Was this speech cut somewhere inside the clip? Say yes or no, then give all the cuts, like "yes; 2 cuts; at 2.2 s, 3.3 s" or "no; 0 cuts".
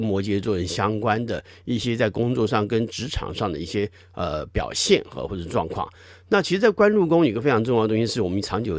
no; 0 cuts